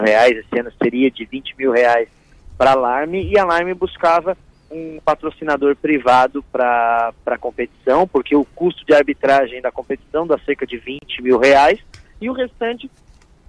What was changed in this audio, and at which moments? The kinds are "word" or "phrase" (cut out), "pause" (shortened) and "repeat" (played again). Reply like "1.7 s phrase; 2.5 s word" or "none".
none